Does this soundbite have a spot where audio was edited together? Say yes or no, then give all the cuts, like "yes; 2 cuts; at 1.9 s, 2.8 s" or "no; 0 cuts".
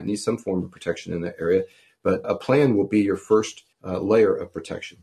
yes; 2 cuts; at 2.2 s, 3.7 s